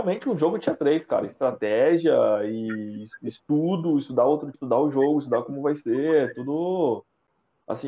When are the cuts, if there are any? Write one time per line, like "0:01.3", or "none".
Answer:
0:04.5